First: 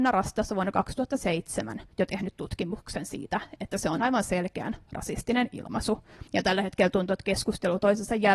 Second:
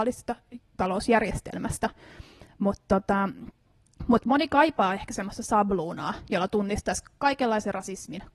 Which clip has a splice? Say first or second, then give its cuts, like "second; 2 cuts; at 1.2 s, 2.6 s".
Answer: first; 2 cuts; at 1.9 s, 6.3 s